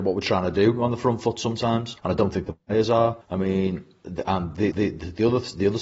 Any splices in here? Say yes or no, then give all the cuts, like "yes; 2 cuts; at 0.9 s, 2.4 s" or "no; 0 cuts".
yes; 3 cuts; at 2.0 s, 3.2 s, 4.7 s